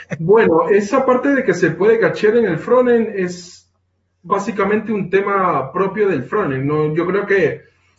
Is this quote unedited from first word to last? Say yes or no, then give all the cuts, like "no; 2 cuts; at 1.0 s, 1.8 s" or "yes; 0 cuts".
yes; 0 cuts